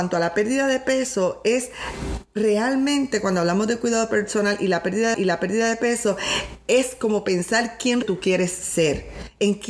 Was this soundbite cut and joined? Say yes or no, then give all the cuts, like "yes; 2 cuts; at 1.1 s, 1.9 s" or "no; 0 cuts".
yes; 2 cuts; at 5.1 s, 8.0 s